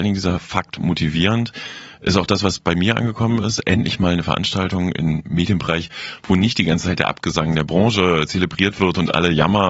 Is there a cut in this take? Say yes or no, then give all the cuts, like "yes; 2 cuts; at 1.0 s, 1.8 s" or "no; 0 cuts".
no; 0 cuts